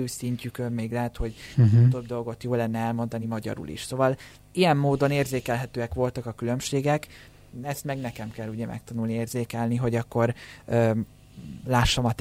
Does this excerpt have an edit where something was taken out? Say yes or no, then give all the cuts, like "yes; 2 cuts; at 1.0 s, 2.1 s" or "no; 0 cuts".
no; 0 cuts